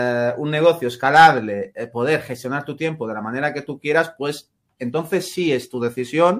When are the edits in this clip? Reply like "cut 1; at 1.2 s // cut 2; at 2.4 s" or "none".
none

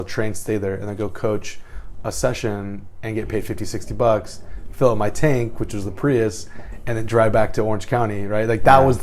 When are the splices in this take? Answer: none

